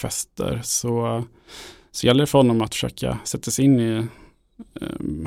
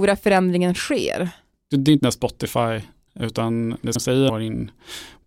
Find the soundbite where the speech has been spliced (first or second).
second